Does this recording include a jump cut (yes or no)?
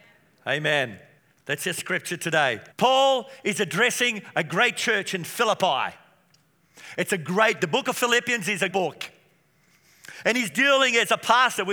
yes